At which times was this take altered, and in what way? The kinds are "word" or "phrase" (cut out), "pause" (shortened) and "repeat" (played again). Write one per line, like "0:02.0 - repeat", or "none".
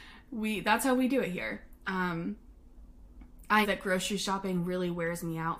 0:03.6 - word